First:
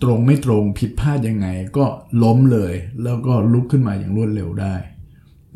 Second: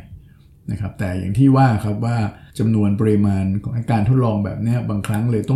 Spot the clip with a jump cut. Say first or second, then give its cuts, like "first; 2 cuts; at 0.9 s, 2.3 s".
second; 1 cut; at 2.5 s